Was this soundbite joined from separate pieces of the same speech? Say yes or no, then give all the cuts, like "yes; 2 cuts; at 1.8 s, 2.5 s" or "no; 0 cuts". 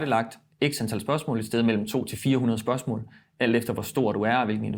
no; 0 cuts